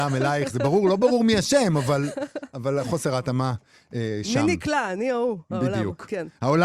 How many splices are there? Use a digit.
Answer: 0